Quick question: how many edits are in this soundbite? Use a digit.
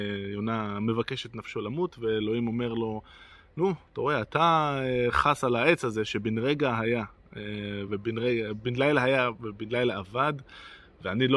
0